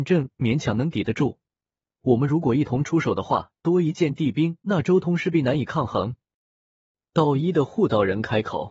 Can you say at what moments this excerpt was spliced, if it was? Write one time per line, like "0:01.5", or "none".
0:03.6
0:04.6